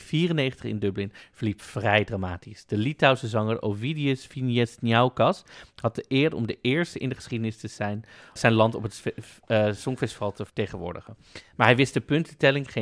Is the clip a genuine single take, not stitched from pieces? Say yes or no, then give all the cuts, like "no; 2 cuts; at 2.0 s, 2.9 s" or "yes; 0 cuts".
no; 2 cuts; at 8.4 s, 10.5 s